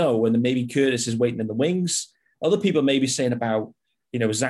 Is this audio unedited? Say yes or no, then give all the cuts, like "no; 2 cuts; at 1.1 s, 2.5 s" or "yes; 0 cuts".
yes; 0 cuts